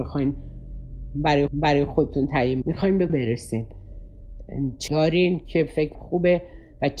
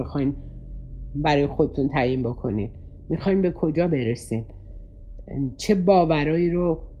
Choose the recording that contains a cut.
first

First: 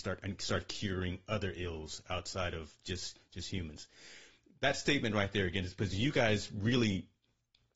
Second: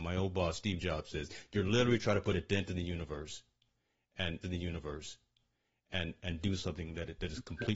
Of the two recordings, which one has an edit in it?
second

